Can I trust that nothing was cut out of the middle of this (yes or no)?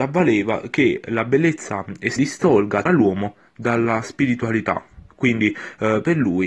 no